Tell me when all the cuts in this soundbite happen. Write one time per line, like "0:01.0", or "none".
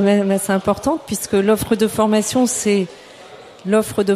none